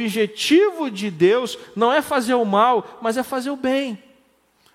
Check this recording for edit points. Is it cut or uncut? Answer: uncut